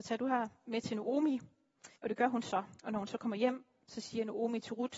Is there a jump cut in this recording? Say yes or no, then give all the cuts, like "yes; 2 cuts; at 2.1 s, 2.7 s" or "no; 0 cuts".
yes; 2 cuts; at 2.0 s, 2.8 s